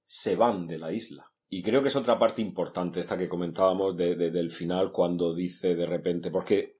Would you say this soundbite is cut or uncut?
uncut